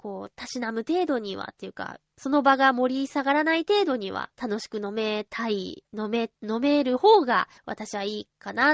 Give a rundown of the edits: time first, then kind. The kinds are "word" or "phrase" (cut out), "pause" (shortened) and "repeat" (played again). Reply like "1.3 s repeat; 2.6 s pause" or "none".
4.3 s pause; 6.3 s pause; 7.6 s pause